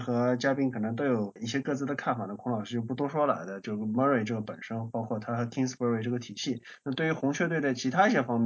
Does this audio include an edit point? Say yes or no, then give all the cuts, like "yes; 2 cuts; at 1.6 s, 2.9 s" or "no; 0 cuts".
no; 0 cuts